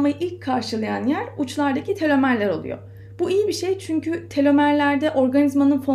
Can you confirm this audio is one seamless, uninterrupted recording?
yes; 0 cuts

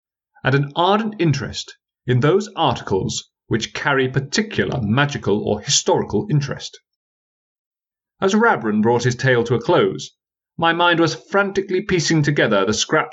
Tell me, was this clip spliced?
no; 0 cuts

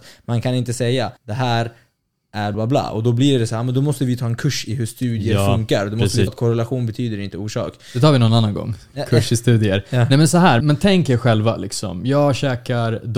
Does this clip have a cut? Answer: yes; 4 cuts; at 1.2 s, 2.5 s, 6.3 s, 10.6 s

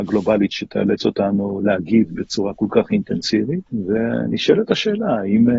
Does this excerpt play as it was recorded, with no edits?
no; 1 cut; at 3.7 s

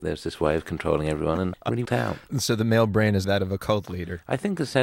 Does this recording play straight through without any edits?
no; 3 cuts; at 1.5 s, 1.8 s, 3.2 s

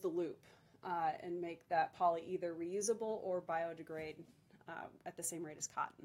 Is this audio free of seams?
yes; 0 cuts

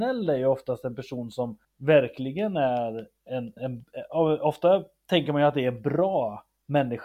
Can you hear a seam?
yes; 2 cuts; at 1.6 s, 3.6 s

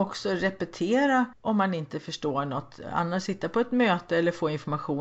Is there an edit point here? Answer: yes; 1 cut; at 1.3 s

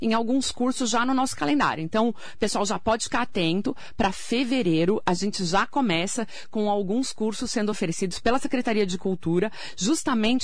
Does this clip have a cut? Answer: no; 0 cuts

